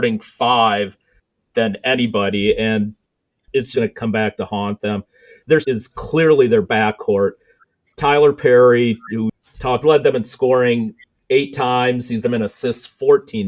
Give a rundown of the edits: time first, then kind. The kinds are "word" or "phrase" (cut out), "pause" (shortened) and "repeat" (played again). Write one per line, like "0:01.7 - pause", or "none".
0:03.7 - word
0:05.6 - word
0:09.8 - phrase
0:12.2 - word